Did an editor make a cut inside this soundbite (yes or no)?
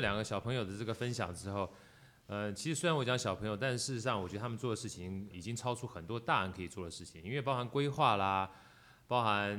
yes